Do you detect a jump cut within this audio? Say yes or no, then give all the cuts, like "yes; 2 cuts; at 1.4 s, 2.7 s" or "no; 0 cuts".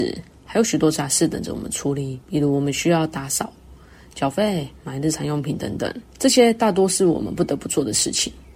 yes; 2 cuts; at 2.2 s, 6.1 s